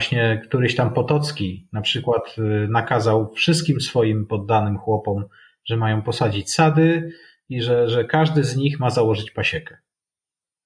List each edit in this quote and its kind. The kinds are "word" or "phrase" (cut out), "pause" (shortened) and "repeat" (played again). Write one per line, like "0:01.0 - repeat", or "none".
none